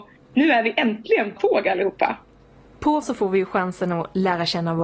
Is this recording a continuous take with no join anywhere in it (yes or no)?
no